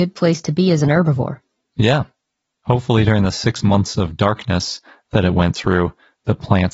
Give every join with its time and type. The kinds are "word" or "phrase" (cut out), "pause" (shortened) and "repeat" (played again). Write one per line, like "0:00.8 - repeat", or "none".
none